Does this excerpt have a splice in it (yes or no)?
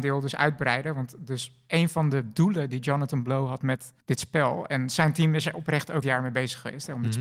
yes